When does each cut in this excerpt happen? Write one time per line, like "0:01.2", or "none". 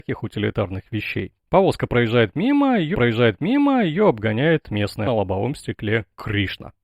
0:01.4
0:02.9
0:05.1